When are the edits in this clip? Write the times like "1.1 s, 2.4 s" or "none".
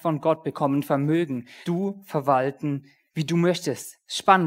1.6 s, 3.1 s